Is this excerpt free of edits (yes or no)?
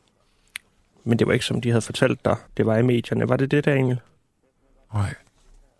no